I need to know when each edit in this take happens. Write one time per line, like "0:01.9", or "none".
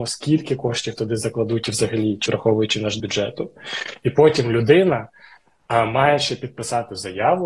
0:02.3
0:03.0